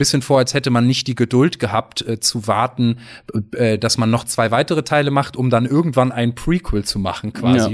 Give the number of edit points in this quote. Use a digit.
0